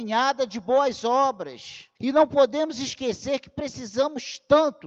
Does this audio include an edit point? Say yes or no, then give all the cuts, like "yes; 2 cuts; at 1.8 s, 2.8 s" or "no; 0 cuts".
yes; 1 cut; at 2.0 s